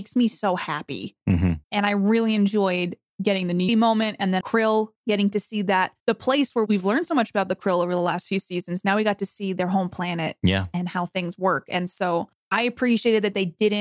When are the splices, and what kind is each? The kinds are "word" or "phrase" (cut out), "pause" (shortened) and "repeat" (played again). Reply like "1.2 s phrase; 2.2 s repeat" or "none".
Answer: 1.6 s pause; 3.7 s phrase; 4.4 s word; 5.0 s pause; 6.0 s pause